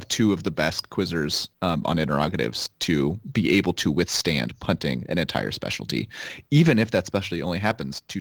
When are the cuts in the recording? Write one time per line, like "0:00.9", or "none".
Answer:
0:01.5